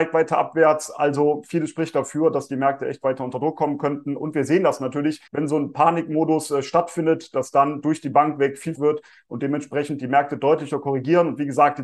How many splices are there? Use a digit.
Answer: 2